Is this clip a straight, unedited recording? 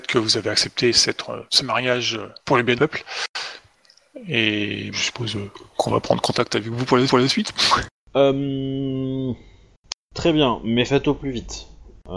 no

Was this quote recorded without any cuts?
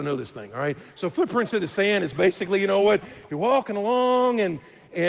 yes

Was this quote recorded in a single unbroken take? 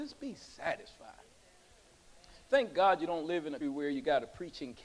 no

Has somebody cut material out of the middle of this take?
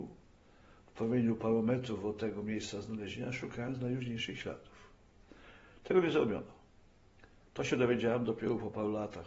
no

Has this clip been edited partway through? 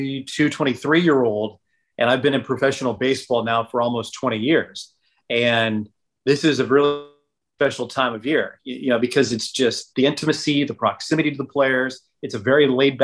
no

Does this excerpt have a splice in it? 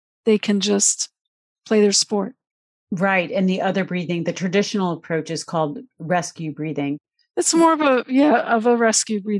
no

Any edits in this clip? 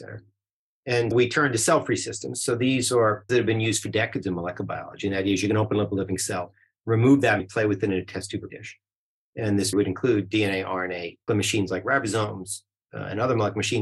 yes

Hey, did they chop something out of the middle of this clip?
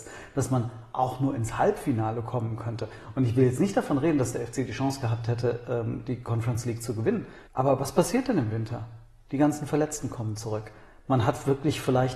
yes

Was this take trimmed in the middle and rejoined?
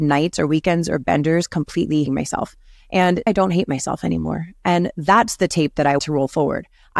yes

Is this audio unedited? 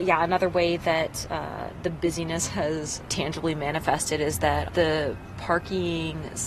no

